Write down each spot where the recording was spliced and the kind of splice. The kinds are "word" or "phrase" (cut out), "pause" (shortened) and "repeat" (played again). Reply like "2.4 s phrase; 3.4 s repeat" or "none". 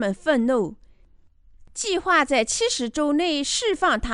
1.7 s phrase